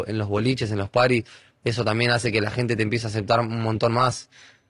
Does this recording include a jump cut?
no; 0 cuts

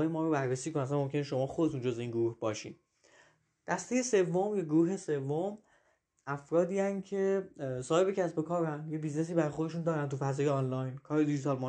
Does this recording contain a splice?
no; 0 cuts

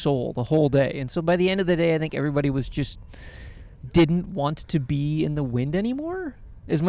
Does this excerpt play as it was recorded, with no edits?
yes; 0 cuts

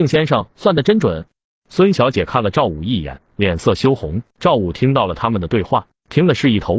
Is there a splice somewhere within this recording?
yes; 2 cuts; at 3.3 s, 4.3 s

